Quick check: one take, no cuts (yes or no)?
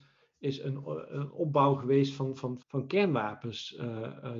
no